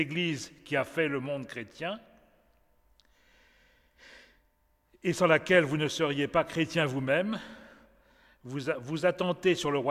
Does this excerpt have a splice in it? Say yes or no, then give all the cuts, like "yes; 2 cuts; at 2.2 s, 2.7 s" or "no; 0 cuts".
no; 0 cuts